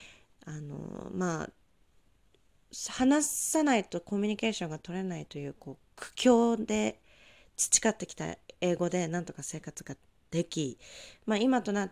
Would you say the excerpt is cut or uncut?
uncut